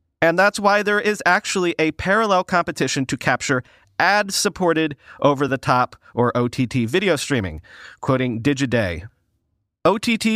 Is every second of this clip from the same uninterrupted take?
yes; 0 cuts

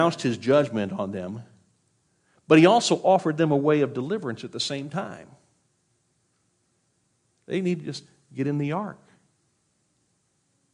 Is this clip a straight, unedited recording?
yes; 0 cuts

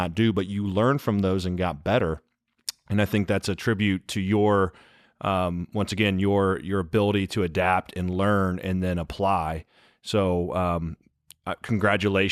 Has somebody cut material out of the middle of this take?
no; 0 cuts

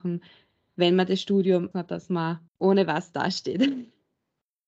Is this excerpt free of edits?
no; 2 cuts; at 1.7 s, 2.5 s

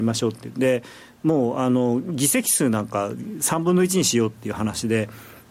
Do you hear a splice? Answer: no; 0 cuts

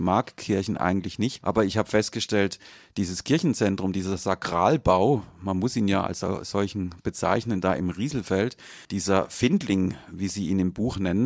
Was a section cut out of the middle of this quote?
yes; 1 cut; at 8.8 s

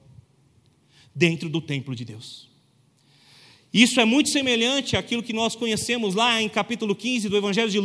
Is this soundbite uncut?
yes; 0 cuts

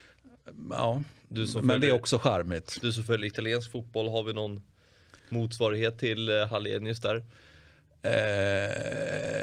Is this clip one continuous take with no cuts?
yes; 0 cuts

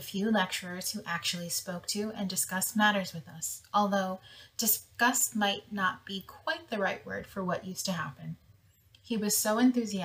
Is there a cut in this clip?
no; 0 cuts

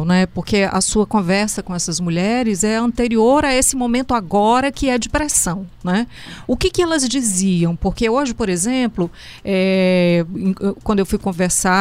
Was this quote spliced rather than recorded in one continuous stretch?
no; 0 cuts

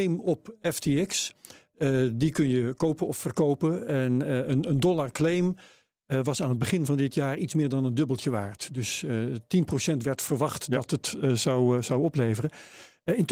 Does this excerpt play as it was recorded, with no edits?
yes; 0 cuts

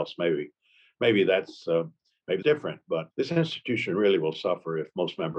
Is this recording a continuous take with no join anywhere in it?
no; 2 cuts; at 2.4 s, 3.1 s

